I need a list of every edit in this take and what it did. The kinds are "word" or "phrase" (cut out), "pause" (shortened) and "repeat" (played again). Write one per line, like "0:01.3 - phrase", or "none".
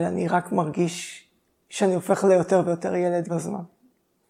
0:03.3 - word